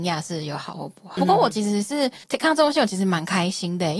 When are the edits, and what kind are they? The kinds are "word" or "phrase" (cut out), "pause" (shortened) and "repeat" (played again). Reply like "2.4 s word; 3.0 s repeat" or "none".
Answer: 1.2 s phrase; 2.2 s pause